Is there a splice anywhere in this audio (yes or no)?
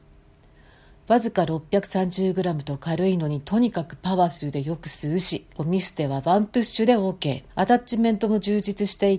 yes